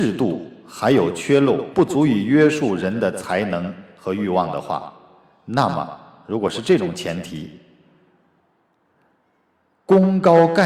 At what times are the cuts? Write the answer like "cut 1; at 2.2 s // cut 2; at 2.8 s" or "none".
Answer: cut 1; at 1.7 s